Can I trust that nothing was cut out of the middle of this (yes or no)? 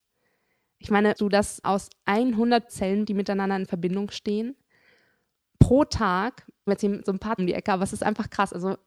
no